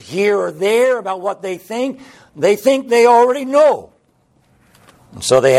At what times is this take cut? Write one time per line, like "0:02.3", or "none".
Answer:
none